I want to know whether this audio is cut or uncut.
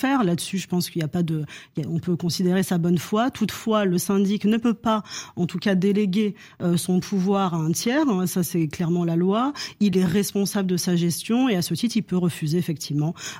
uncut